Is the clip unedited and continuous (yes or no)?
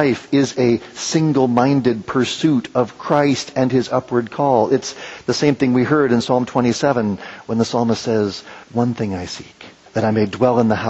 no